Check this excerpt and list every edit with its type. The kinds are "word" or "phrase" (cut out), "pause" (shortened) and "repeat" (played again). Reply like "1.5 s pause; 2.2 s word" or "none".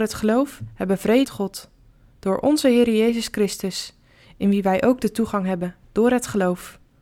1.2 s word; 5.8 s pause